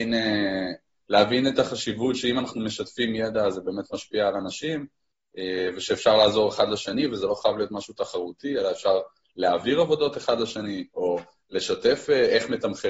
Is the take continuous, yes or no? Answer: yes